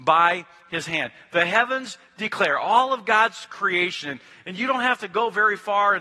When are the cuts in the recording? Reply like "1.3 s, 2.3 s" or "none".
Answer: none